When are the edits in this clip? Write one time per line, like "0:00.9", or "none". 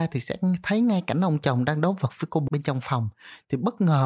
0:02.5